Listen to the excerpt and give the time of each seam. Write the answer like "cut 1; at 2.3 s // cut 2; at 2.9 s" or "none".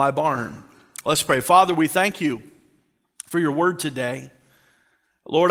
none